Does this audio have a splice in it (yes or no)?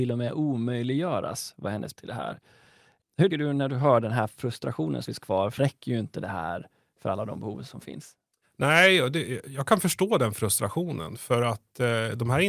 yes